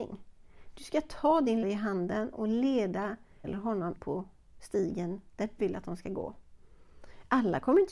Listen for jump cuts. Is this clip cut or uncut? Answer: cut